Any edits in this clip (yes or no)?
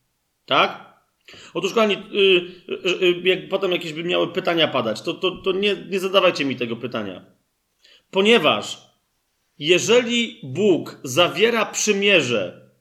no